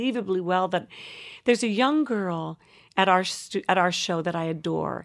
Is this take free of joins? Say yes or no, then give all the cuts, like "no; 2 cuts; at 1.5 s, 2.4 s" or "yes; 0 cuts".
yes; 0 cuts